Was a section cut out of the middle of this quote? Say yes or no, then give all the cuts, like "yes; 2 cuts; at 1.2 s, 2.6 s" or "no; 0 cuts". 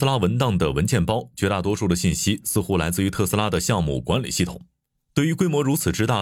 no; 0 cuts